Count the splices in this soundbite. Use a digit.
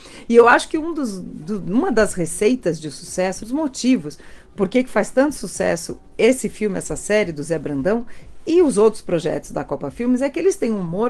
1